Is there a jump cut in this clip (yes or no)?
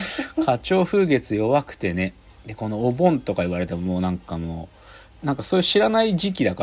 no